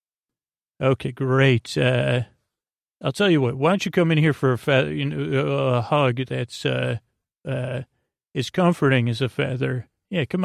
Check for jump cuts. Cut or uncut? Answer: uncut